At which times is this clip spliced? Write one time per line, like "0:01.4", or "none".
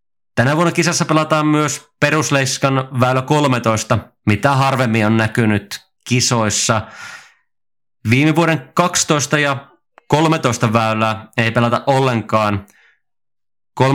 none